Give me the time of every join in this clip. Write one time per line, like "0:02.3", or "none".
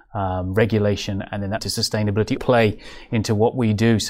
0:01.6
0:02.4